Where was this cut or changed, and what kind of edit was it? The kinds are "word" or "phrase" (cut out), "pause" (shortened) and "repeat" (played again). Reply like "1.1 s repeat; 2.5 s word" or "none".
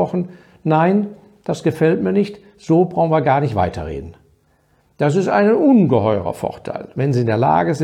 none